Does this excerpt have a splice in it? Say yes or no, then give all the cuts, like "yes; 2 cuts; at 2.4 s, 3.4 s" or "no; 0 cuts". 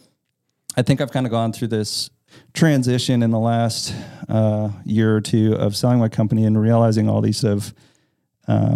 yes; 1 cut; at 7.4 s